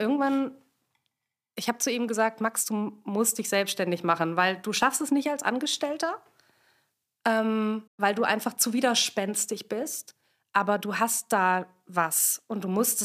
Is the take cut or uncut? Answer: cut